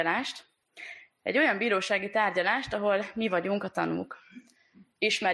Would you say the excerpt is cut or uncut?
uncut